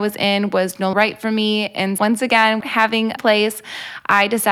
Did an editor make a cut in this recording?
yes; 4 cuts; at 0.9 s, 2.0 s, 2.6 s, 3.2 s

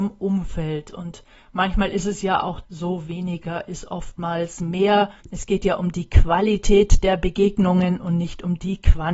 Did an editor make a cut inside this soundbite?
yes; 2 cuts; at 2.6 s, 5.2 s

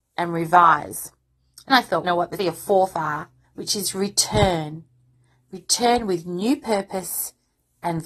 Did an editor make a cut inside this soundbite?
yes; 4 cuts; at 1.7 s, 2.0 s, 2.4 s, 3.4 s

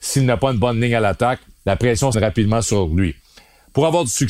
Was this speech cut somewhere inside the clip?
yes; 1 cut; at 2.1 s

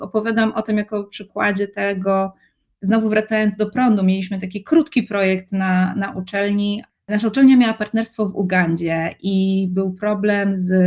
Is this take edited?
no; 0 cuts

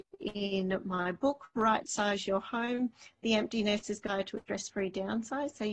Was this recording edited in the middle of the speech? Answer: no; 0 cuts

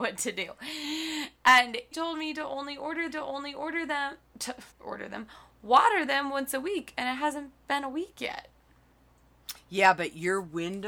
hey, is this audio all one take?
no; 3 cuts; at 1.9 s, 3.1 s, 4.7 s

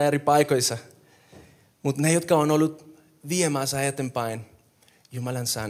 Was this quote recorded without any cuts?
yes; 0 cuts

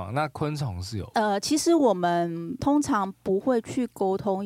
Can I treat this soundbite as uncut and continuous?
yes; 0 cuts

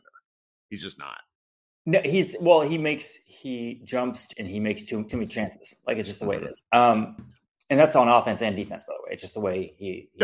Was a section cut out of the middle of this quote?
yes; 3 cuts; at 4.3 s, 5.1 s, 6.7 s

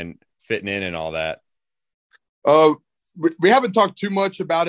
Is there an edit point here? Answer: no; 0 cuts

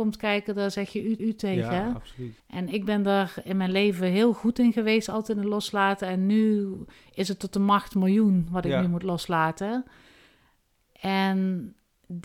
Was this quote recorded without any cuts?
no; 2 cuts; at 1.2 s, 2.4 s

